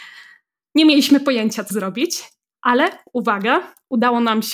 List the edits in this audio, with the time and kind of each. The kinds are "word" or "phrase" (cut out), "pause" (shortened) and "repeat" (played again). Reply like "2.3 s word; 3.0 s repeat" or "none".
1.7 s phrase